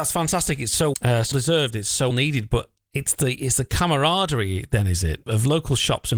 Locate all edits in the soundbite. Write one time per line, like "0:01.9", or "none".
0:00.9
0:01.3
0:02.1
0:05.3